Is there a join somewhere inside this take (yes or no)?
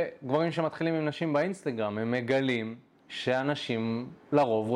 no